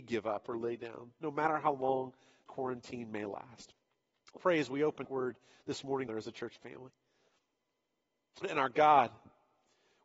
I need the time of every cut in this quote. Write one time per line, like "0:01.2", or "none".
0:02.5
0:04.4
0:05.0
0:06.1
0:08.4